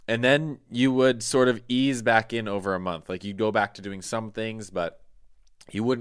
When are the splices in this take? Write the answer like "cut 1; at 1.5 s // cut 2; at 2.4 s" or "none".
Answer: none